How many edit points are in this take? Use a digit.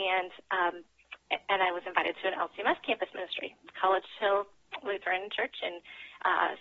0